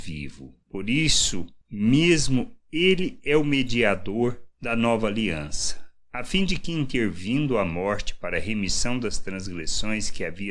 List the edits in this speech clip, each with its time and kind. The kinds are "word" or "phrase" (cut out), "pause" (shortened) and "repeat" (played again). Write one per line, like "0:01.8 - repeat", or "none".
0:04.5 - pause